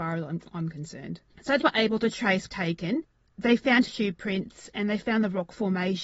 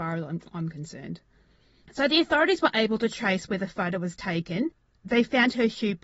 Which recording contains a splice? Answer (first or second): first